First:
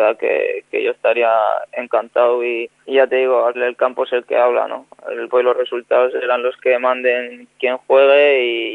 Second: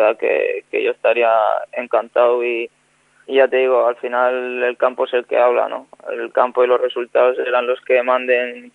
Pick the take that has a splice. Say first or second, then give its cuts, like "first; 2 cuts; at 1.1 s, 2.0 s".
first; 3 cuts; at 2.8 s, 3.5 s, 5.3 s